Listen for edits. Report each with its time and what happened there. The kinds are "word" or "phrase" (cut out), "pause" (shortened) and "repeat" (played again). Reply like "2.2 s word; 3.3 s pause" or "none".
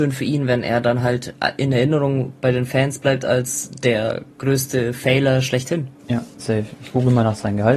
6.0 s pause